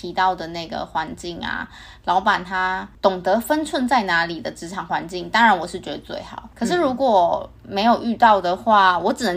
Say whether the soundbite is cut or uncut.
cut